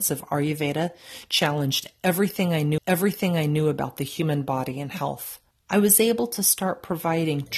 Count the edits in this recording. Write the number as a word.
two